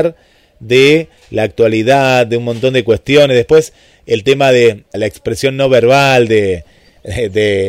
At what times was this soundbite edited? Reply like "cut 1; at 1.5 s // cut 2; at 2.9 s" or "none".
cut 1; at 4.9 s